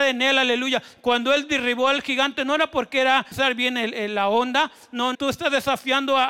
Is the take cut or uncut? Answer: cut